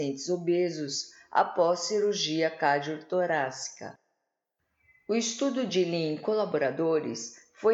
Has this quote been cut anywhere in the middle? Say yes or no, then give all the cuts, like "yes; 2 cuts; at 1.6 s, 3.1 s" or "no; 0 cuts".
no; 0 cuts